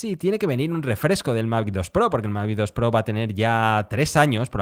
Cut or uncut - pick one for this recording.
uncut